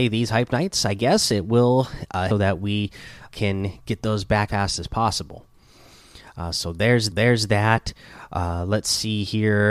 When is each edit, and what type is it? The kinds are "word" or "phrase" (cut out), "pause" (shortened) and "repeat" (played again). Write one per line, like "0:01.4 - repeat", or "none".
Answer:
0:02.3 - phrase
0:03.3 - word
0:04.5 - word
0:07.1 - repeat